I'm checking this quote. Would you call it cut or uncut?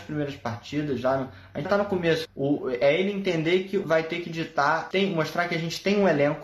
cut